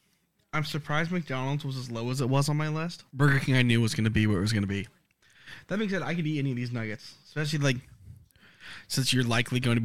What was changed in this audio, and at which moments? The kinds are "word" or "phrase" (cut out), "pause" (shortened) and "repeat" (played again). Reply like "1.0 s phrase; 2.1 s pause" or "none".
3.1 s pause